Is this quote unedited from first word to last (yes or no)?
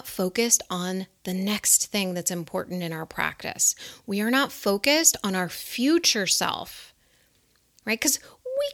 yes